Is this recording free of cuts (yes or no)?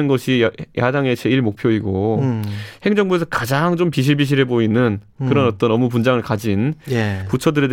yes